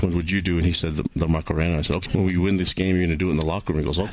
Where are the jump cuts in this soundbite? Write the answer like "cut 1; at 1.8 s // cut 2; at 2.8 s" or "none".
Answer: cut 1; at 2.1 s